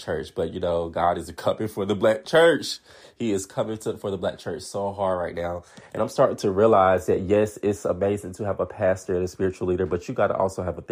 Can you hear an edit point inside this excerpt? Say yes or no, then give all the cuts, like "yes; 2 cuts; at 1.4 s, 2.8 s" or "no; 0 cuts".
no; 0 cuts